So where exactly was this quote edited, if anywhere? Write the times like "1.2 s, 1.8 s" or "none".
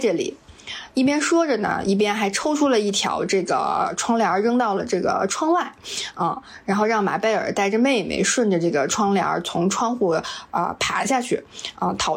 none